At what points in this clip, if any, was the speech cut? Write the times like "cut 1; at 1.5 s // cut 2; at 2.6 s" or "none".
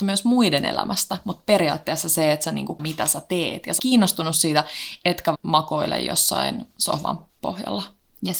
cut 1; at 2.8 s // cut 2; at 3.8 s // cut 3; at 5.3 s

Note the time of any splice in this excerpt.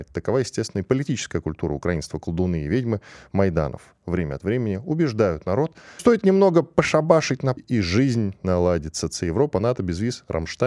cut 1; at 6.0 s // cut 2; at 7.6 s

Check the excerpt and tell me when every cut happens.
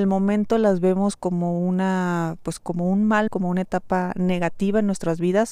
cut 1; at 3.3 s

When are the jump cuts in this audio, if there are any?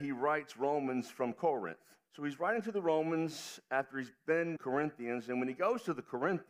cut 1; at 2.0 s // cut 2; at 4.6 s

